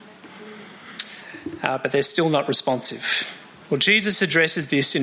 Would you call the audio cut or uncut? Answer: uncut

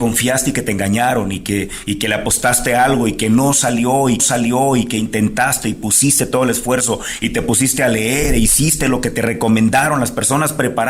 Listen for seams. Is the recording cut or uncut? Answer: cut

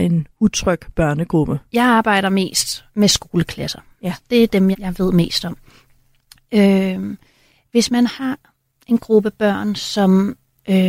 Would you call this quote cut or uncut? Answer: cut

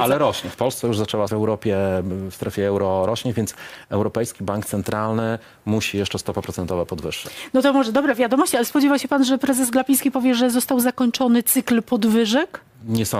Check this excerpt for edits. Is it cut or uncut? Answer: cut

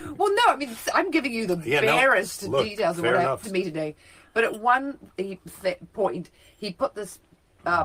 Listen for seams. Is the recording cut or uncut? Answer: cut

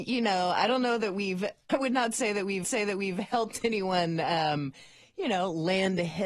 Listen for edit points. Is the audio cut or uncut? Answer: cut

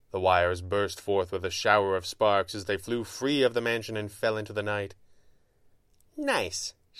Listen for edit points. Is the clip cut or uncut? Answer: uncut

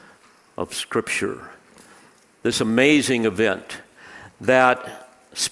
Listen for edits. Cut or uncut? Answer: uncut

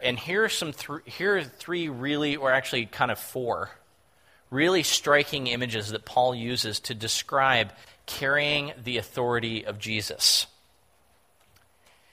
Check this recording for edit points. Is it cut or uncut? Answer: uncut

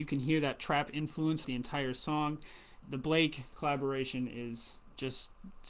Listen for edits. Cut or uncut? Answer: cut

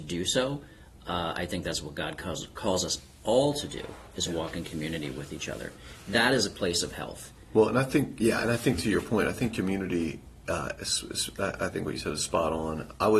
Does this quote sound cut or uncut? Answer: uncut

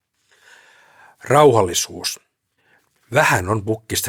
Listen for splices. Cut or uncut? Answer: uncut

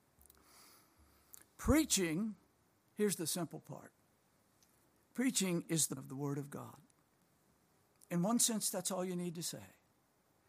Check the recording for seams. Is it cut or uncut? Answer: cut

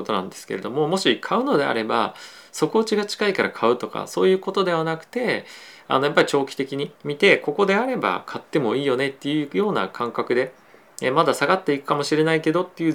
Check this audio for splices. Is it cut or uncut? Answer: cut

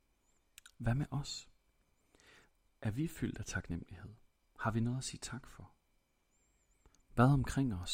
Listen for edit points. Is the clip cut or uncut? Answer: uncut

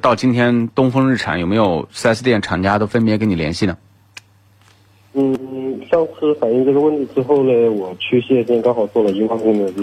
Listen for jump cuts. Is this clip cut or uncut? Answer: uncut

